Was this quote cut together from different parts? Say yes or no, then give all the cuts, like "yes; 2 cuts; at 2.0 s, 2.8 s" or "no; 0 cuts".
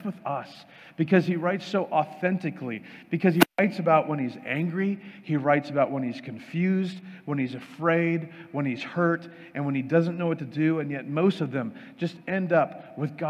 no; 0 cuts